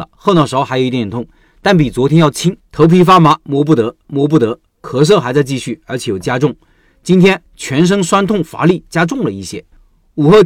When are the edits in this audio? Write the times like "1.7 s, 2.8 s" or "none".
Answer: 2.6 s, 4.0 s